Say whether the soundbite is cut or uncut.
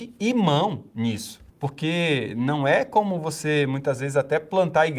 cut